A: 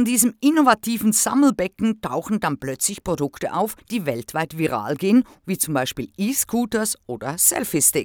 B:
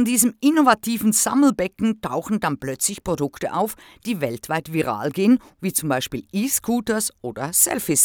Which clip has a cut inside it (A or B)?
A